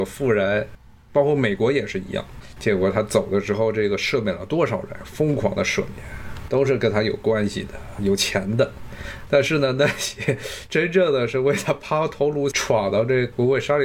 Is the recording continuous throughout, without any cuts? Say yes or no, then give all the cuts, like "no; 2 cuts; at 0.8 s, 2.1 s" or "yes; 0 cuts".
no; 1 cut; at 12.5 s